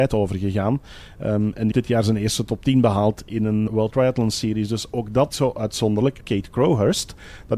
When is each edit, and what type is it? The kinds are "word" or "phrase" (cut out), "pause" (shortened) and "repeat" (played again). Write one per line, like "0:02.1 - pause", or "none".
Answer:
0:01.7 - word
0:03.7 - word
0:05.3 - word
0:06.2 - phrase

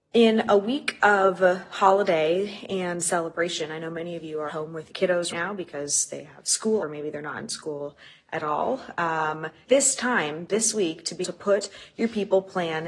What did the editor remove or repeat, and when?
0:04.5 - word
0:04.9 - word
0:05.3 - word
0:06.8 - word
0:09.7 - word
0:11.2 - word

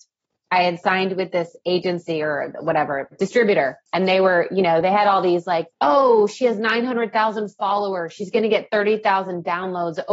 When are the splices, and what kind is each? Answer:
0:03.9 - pause
0:05.7 - pause

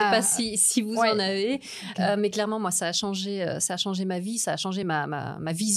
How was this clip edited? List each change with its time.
none

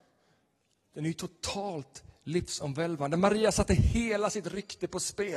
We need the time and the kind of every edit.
none

